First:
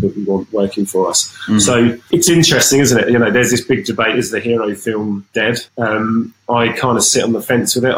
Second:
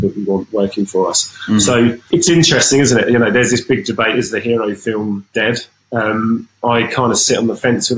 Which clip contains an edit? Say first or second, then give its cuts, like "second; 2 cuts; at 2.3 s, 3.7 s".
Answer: first; 1 cut; at 5.7 s